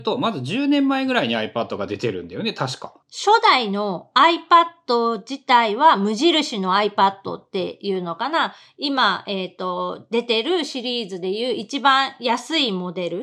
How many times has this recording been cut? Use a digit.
1